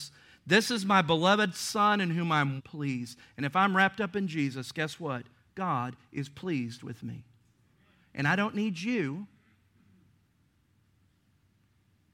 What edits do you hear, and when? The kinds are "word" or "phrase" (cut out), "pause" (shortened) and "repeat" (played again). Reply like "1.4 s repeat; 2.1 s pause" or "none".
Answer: 2.6 s word